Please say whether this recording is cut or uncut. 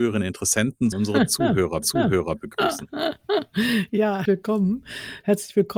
cut